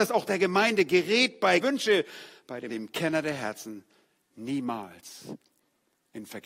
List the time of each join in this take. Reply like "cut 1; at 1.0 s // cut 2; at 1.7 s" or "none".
cut 1; at 1.6 s // cut 2; at 2.7 s